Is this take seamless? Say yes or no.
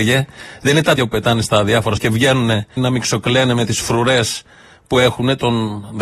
no